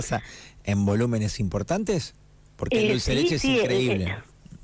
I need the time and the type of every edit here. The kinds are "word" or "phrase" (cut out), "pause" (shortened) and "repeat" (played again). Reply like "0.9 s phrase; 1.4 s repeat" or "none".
none